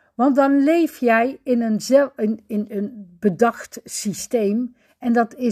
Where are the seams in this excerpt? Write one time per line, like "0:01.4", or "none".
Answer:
none